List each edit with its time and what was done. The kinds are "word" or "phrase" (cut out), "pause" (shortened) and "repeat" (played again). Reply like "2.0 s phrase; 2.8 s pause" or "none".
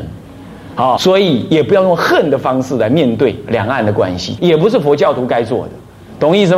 1.0 s word; 4.4 s phrase